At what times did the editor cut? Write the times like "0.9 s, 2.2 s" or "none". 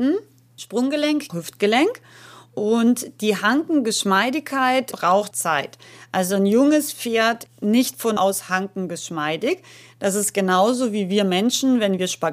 1.3 s, 5.3 s, 7.5 s, 8.2 s

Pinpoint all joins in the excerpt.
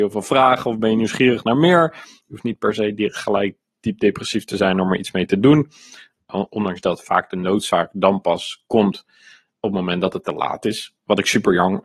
none

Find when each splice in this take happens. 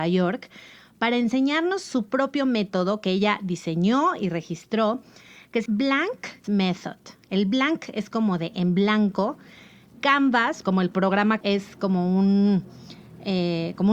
5.7 s, 6.4 s, 10.6 s, 11.4 s

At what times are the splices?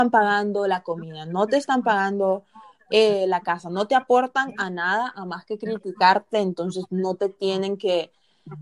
none

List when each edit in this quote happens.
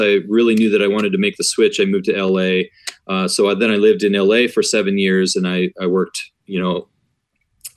6.3 s

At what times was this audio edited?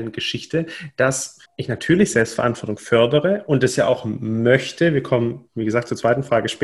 1.5 s, 5.5 s

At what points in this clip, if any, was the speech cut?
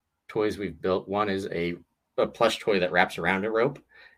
none

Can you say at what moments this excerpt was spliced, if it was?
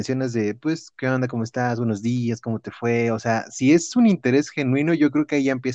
none

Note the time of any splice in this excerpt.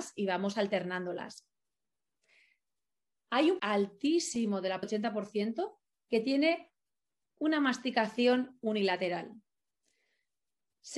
3.6 s, 4.8 s

